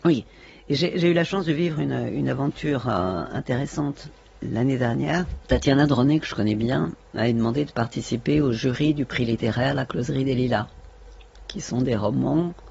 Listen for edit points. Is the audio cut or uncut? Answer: cut